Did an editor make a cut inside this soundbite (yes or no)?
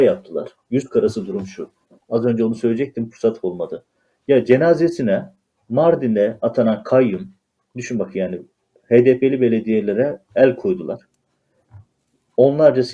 no